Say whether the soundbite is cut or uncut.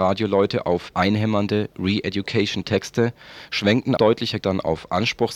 cut